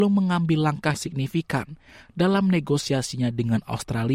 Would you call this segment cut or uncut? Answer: cut